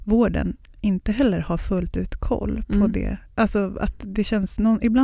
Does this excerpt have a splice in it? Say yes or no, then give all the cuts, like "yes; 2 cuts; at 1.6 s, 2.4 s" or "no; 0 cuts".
no; 0 cuts